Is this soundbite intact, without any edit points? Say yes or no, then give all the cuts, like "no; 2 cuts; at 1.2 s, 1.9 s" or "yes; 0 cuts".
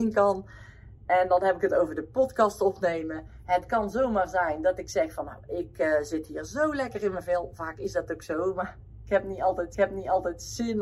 no; 1 cut; at 9.7 s